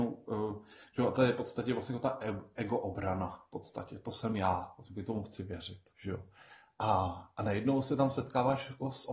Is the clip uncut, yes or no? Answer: no